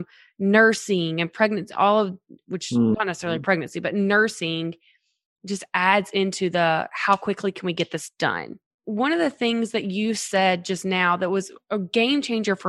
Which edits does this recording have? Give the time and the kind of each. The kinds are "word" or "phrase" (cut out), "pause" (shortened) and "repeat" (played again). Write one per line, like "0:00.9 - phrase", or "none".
none